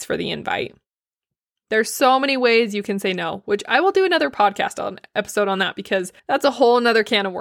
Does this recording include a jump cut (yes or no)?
yes